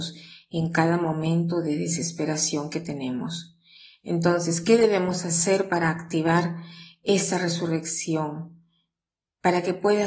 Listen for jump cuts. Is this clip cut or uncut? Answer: uncut